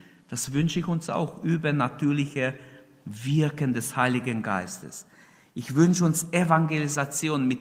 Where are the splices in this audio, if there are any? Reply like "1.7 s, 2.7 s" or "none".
none